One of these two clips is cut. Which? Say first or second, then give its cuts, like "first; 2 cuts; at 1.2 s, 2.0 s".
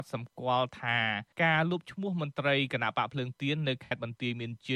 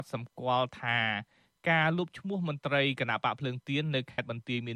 first; 1 cut; at 1.3 s